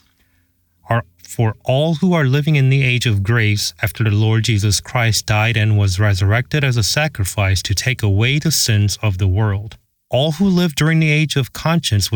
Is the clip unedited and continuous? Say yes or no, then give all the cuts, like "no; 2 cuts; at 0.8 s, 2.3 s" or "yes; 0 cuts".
no; 1 cut; at 10.0 s